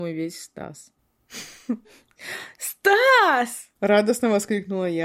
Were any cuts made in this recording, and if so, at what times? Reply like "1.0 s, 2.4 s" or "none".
3.8 s